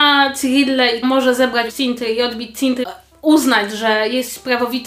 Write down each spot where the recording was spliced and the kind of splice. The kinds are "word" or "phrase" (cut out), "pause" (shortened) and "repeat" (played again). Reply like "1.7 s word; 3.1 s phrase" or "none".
1.0 s word; 1.7 s word; 2.8 s phrase